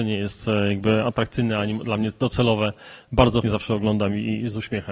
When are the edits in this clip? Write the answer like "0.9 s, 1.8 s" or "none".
3.4 s